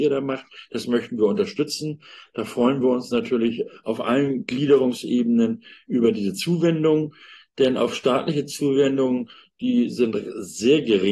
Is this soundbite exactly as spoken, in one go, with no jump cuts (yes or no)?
yes